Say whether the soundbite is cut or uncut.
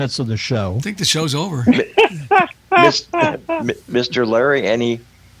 uncut